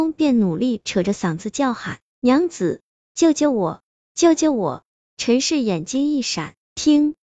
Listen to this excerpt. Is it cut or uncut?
uncut